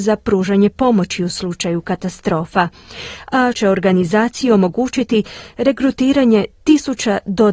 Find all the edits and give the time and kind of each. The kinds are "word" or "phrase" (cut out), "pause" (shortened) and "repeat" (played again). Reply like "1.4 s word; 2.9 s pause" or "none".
3.5 s word